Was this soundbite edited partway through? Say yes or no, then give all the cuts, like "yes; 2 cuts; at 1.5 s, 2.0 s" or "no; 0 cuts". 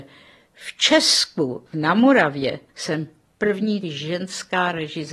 yes; 3 cuts; at 1.7 s, 2.7 s, 3.8 s